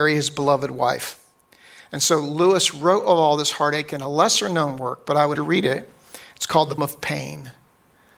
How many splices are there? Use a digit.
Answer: 2